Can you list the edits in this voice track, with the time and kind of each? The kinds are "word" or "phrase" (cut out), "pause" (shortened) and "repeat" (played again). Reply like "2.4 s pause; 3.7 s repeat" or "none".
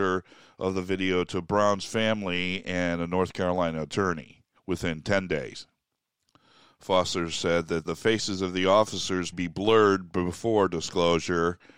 4.6 s pause; 6.0 s pause; 7.9 s word; 9.3 s word